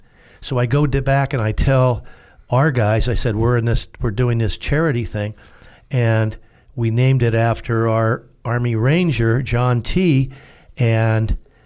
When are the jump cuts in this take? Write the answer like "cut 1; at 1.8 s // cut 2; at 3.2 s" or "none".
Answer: none